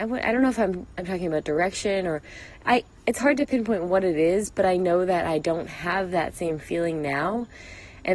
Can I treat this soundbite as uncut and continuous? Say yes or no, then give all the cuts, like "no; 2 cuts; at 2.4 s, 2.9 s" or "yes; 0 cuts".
yes; 0 cuts